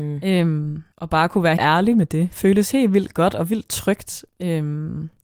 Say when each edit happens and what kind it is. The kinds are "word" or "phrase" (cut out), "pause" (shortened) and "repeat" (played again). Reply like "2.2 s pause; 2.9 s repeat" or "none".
0.9 s pause; 1.6 s word